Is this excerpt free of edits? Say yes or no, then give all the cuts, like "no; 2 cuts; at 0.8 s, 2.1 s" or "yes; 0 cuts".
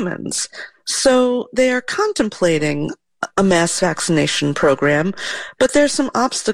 yes; 0 cuts